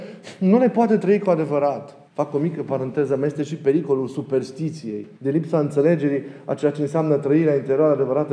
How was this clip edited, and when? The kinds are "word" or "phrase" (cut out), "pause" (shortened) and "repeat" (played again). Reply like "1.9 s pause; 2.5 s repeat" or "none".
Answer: 2.1 s pause; 5.1 s pause